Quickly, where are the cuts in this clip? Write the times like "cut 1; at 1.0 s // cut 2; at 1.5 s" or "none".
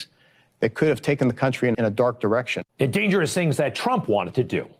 cut 1; at 1.7 s // cut 2; at 2.7 s